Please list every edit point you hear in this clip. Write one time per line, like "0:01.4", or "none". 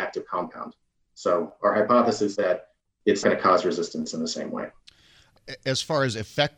0:02.3
0:03.2